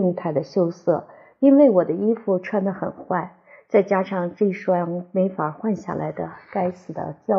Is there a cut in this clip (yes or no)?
no